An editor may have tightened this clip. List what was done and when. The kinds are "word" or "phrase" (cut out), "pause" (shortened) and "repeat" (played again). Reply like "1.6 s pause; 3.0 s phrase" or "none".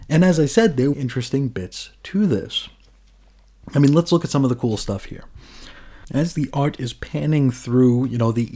0.9 s phrase